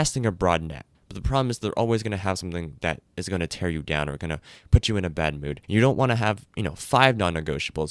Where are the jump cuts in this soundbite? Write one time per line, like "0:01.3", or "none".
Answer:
0:00.9
0:05.6